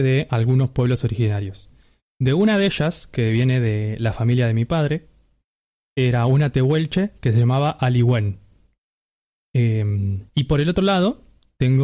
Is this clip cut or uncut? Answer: cut